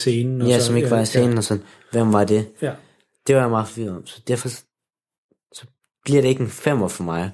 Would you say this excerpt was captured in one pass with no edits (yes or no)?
yes